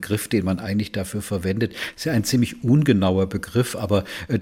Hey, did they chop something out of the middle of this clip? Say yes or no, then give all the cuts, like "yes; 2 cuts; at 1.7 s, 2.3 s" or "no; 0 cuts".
no; 0 cuts